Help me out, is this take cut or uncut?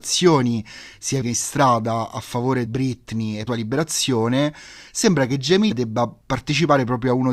cut